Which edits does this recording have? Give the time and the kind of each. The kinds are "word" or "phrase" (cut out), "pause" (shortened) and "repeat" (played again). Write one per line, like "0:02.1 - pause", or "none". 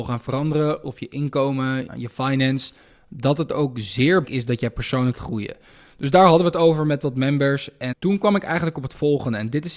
0:01.9 - word
0:04.2 - word
0:05.1 - word
0:07.9 - word